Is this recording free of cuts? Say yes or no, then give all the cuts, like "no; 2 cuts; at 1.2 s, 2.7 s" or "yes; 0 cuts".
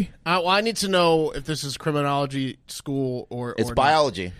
yes; 0 cuts